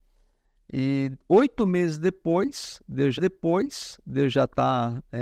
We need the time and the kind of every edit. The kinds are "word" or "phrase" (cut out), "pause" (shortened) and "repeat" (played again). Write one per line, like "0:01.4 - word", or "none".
0:03.2 - repeat